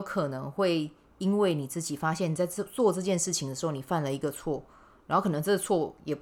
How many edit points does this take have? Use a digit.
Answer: 0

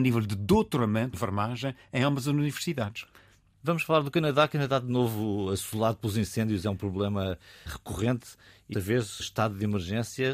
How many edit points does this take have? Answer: 4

